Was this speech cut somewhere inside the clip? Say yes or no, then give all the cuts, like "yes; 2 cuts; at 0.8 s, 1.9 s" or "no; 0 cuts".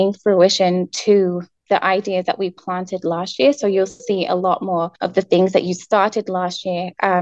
yes; 1 cut; at 5.0 s